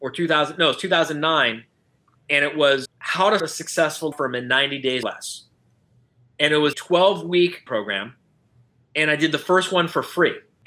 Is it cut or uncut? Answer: cut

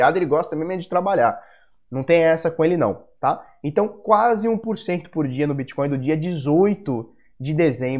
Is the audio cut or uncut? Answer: uncut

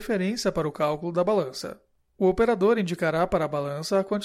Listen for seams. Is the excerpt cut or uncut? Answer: uncut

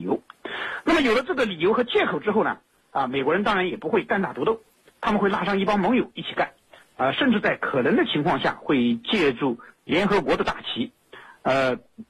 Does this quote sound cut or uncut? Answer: uncut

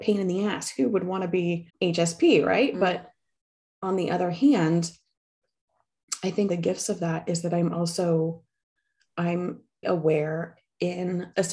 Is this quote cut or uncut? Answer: cut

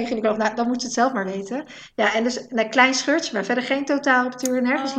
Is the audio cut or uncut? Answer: uncut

